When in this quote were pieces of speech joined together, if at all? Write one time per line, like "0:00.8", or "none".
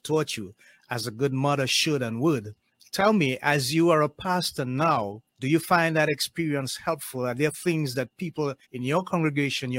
0:02.7
0:05.3
0:08.6